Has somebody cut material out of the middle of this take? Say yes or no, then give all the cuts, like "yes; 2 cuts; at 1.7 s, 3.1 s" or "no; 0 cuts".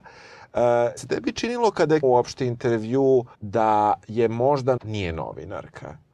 yes; 4 cuts; at 1.0 s, 2.0 s, 3.3 s, 4.8 s